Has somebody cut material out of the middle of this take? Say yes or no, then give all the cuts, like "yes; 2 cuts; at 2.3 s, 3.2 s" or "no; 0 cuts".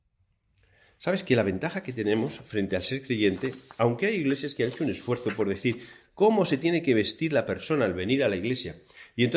no; 0 cuts